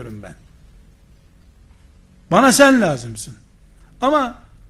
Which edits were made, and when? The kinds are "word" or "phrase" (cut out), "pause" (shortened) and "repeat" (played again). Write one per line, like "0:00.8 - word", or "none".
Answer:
0:03.5 - pause

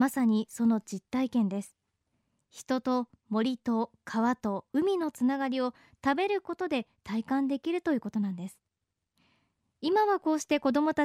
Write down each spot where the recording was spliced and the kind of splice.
none

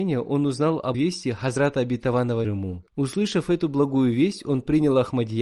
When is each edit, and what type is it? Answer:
0:00.9 - word
0:02.4 - phrase
0:02.9 - pause

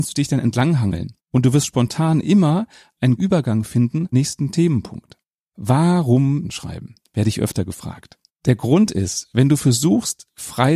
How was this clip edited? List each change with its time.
0:03.2 - word
0:04.1 - word
0:06.4 - phrase

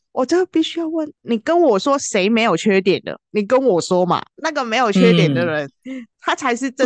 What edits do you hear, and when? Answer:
none

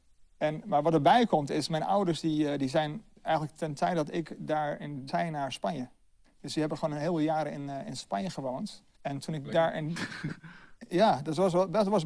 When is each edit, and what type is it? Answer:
0:05.1 - phrase
0:08.9 - pause

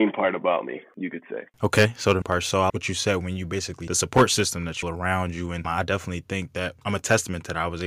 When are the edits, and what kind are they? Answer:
0:01.5 - pause
0:02.2 - word
0:02.7 - word
0:03.9 - phrase
0:04.8 - phrase
0:05.6 - word

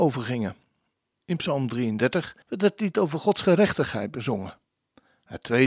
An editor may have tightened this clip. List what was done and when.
0:02.4 - pause

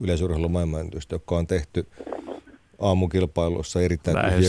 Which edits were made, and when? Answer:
none

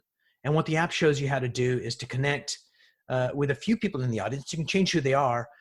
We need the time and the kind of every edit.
none

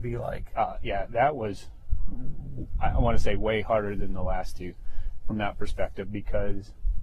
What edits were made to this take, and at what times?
none

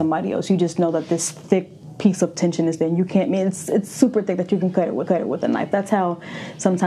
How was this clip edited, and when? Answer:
0:05.1 - repeat

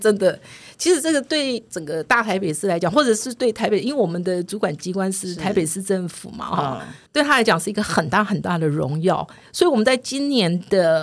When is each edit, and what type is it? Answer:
0:07.1 - pause

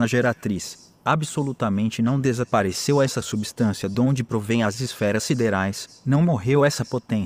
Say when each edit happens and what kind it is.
none

